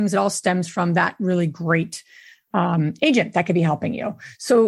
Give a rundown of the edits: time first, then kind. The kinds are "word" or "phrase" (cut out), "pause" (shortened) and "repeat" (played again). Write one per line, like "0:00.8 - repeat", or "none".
none

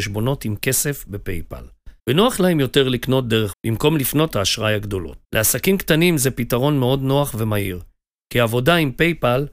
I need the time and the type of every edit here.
0:02.0 - pause
0:03.5 - word
0:04.3 - word
0:05.2 - pause

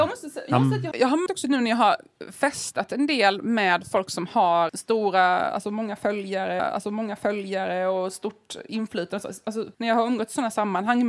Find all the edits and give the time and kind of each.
0:00.9 - word
0:01.3 - word
0:04.7 - word
0:06.6 - repeat
0:09.7 - pause

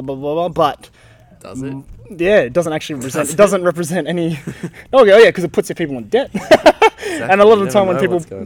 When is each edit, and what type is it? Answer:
none

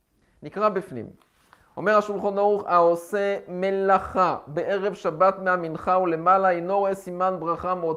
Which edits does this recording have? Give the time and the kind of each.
none

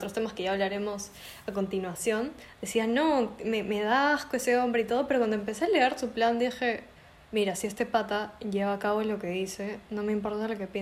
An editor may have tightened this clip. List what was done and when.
0:07.0 - pause

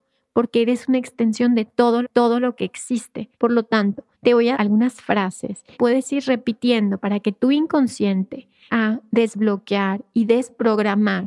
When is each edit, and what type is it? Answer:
0:02.0 - repeat
0:03.3 - pause
0:04.1 - pause
0:04.5 - word
0:05.7 - word
0:08.7 - word

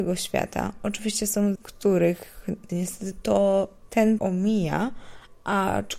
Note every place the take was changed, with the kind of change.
0:01.6 - word
0:02.7 - word
0:04.2 - word

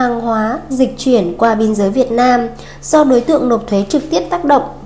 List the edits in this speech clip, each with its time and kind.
none

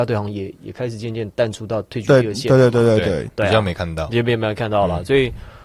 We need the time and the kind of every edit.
0:03.3 - word

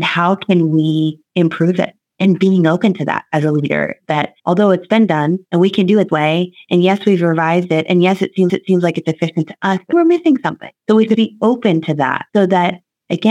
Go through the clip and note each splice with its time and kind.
0:01.3 - pause
0:04.4 - pause
0:05.5 - pause
0:06.1 - word
0:08.5 - repeat
0:09.9 - word
0:10.8 - pause
0:11.1 - word
0:12.3 - pause

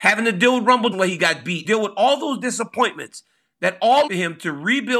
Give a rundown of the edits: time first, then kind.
0:00.9 - word
0:01.6 - word
0:04.1 - word

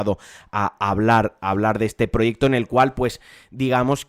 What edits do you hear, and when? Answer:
none

